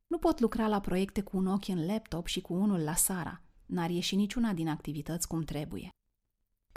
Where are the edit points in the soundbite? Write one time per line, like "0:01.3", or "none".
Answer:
none